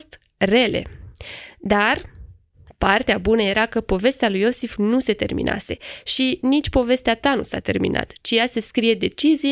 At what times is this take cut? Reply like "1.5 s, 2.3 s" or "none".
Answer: none